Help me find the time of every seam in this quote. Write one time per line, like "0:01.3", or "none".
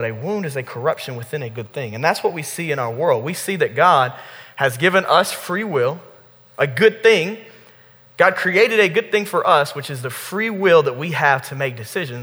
none